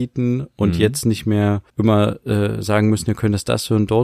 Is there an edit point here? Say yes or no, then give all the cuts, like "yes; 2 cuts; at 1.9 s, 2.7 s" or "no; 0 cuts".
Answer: yes; 1 cut; at 1.7 s